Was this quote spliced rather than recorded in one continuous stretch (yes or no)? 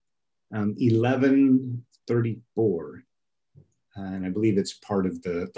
no